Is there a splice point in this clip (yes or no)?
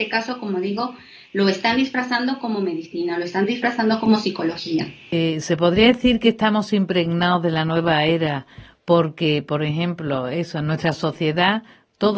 no